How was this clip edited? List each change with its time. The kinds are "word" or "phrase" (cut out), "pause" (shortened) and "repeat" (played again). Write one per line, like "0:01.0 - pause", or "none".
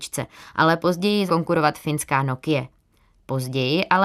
0:01.3 - word